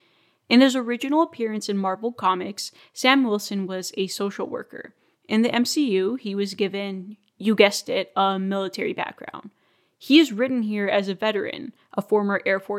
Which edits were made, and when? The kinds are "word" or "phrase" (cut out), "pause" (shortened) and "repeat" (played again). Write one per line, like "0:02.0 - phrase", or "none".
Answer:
none